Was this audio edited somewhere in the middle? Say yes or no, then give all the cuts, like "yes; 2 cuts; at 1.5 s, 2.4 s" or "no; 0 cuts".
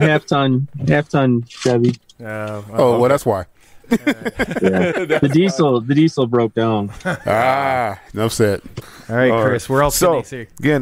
no; 0 cuts